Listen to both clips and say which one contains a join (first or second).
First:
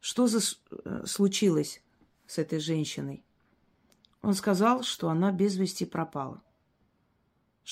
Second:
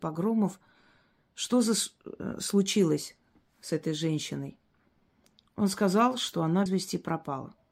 second